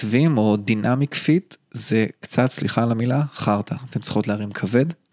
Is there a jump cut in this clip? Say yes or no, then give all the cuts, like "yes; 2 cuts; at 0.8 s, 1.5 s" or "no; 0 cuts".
no; 0 cuts